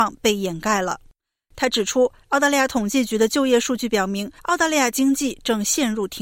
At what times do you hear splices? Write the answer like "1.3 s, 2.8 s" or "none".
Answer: 4.4 s